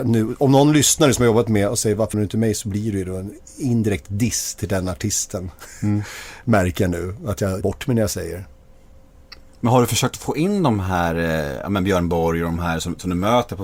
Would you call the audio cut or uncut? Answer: cut